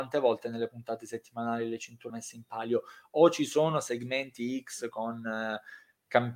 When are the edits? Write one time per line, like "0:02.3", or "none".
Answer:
0:02.1